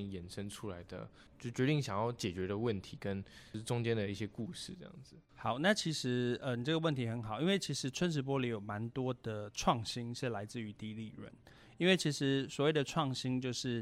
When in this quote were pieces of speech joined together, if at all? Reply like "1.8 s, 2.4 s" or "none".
1.3 s, 5.3 s